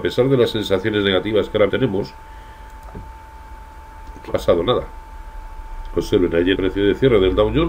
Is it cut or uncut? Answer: cut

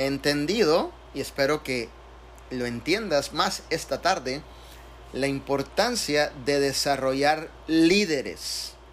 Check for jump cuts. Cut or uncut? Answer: uncut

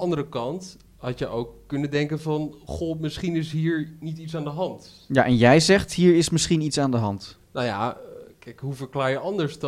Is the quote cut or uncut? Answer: cut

